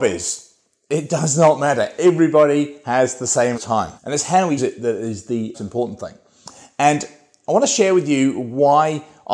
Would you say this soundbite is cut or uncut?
cut